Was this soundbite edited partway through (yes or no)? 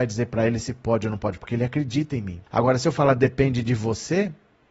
yes